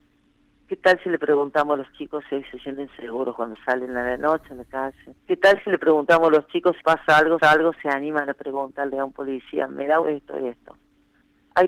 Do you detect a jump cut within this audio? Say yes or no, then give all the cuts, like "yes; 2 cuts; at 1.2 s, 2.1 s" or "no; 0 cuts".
yes; 4 cuts; at 5.2 s, 6.8 s, 7.4 s, 10.0 s